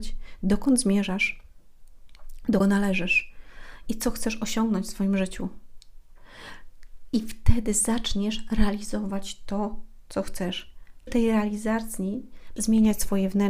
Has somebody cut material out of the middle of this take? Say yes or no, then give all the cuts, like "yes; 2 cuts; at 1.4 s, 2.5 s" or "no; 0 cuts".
yes; 3 cuts; at 2.6 s, 11.1 s, 12.6 s